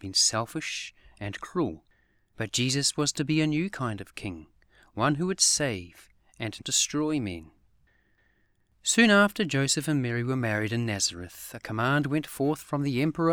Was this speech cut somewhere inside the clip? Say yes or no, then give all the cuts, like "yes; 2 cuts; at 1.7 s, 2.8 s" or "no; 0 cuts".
yes; 1 cut; at 6.6 s